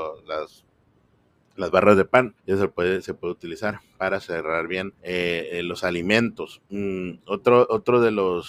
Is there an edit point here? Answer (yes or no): yes